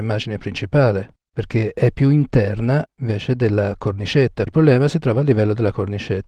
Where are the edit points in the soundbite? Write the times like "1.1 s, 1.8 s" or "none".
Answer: 4.5 s